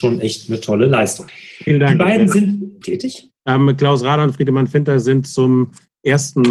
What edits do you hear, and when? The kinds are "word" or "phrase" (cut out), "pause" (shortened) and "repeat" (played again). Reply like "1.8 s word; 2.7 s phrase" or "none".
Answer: 2.8 s phrase; 3.4 s pause

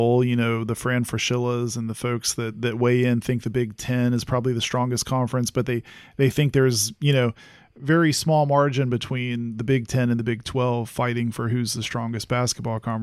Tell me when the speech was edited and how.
none

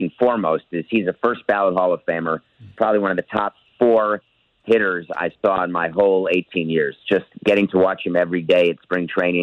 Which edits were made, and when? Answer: none

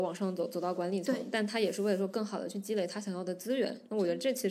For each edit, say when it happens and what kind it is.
none

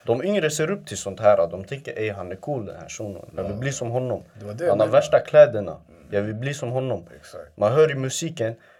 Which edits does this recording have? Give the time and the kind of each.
none

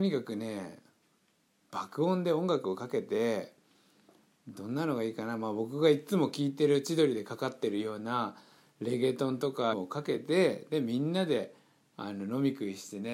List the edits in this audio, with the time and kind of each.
9.7 s word

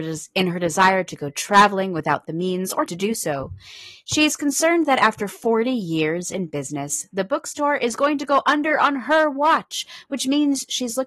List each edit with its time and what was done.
2.9 s word

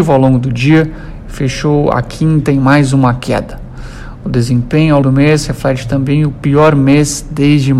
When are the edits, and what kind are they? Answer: 5.0 s word

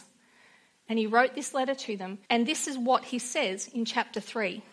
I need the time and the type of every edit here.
2.2 s pause

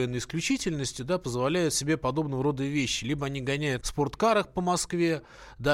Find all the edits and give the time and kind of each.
3.8 s word

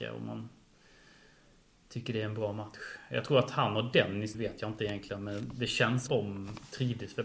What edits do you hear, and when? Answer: 4.3 s word; 6.1 s phrase

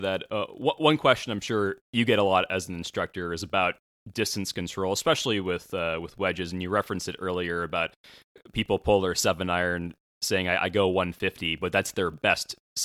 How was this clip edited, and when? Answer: none

